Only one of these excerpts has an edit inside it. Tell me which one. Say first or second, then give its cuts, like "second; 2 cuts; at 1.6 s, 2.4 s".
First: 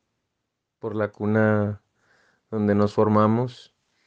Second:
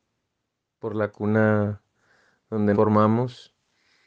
second; 1 cut; at 2.7 s